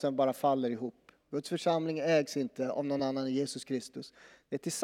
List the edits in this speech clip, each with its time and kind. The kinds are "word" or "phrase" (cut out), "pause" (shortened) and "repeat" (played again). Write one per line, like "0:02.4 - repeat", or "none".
none